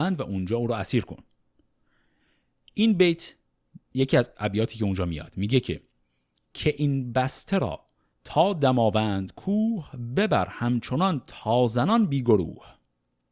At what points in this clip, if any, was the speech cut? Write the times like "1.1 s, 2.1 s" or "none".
none